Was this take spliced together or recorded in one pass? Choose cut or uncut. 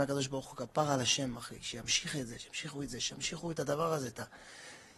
uncut